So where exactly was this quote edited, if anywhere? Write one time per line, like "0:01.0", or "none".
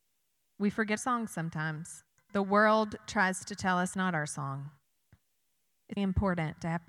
0:01.0
0:03.9
0:06.0